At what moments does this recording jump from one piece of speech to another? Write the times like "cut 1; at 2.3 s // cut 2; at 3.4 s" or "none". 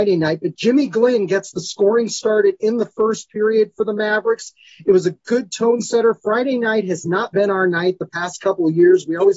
none